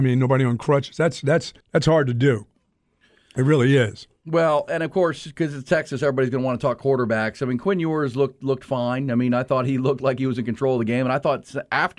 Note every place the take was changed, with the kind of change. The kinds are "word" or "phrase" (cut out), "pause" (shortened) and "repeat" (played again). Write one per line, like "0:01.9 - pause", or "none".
0:01.6 - pause